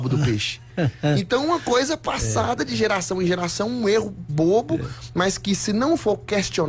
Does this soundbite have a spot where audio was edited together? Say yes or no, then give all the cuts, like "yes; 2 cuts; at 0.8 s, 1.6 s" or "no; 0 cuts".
yes; 1 cut; at 4.3 s